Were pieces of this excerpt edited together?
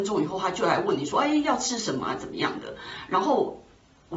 no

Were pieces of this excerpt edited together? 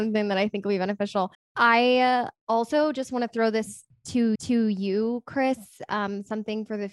yes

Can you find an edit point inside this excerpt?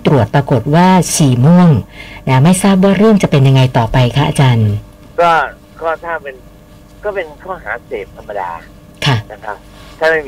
no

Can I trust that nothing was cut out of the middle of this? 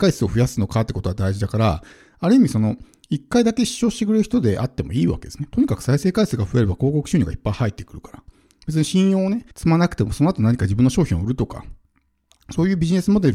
no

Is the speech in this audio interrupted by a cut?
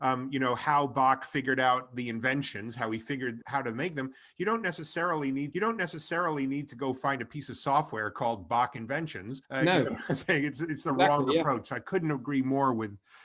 yes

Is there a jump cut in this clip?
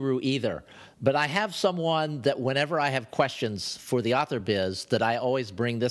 no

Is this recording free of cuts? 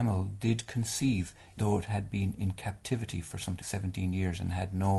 no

